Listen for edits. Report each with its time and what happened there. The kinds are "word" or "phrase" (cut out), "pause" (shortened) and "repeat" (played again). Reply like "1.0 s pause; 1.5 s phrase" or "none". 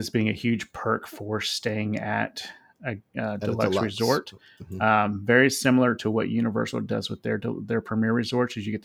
none